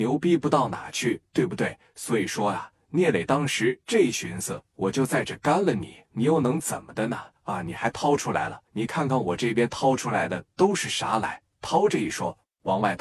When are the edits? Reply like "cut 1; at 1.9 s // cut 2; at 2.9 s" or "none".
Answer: cut 1; at 6.0 s // cut 2; at 7.4 s // cut 3; at 8.7 s